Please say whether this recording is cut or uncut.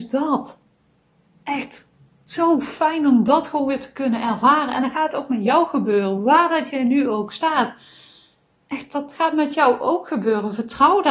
uncut